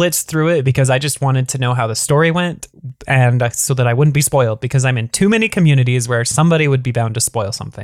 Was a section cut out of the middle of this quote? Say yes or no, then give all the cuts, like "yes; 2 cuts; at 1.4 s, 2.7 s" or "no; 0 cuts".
no; 0 cuts